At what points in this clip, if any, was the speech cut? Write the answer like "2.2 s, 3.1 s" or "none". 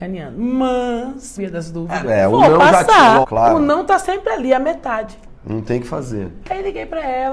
1.4 s, 2.0 s, 3.2 s